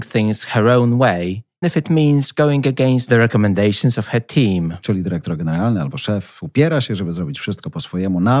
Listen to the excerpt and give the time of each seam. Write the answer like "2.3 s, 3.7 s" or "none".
1.6 s